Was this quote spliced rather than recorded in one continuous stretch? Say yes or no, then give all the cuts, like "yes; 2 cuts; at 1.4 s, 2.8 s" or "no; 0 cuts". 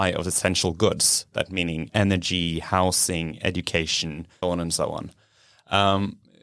yes; 2 cuts; at 1.9 s, 4.4 s